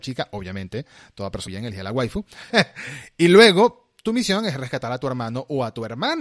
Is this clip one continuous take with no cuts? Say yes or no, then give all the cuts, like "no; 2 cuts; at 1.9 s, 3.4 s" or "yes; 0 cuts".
no; 2 cuts; at 1.5 s, 2.5 s